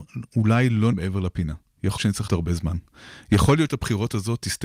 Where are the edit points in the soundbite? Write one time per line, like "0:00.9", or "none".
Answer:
0:00.9
0:02.0
0:02.3
0:03.7